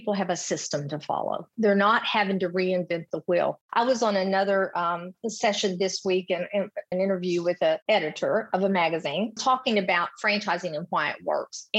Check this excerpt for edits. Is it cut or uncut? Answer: cut